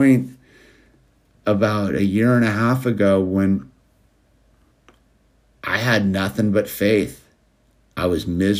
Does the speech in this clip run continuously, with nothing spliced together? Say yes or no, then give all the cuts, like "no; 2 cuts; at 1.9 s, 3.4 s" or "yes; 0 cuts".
yes; 0 cuts